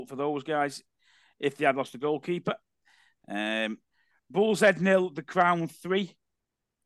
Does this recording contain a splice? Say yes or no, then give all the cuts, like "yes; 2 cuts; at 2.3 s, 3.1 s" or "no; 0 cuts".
no; 0 cuts